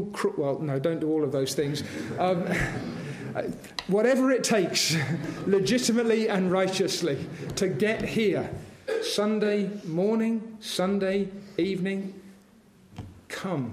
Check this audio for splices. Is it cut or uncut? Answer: uncut